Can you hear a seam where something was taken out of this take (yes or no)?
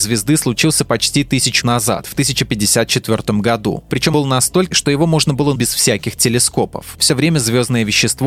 yes